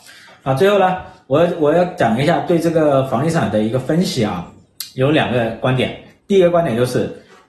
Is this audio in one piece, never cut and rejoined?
yes; 0 cuts

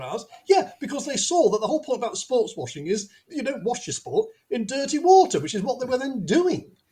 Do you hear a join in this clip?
no; 0 cuts

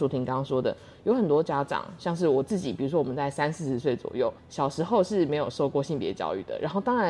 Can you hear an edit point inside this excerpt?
yes; 1 cut; at 4.4 s

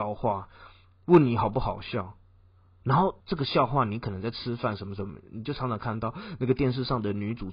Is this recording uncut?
no; 1 cut; at 3.2 s

